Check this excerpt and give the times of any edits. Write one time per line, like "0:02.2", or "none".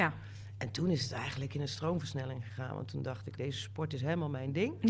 0:03.4